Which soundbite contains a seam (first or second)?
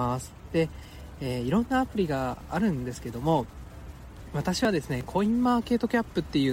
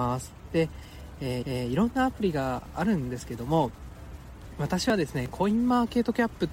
second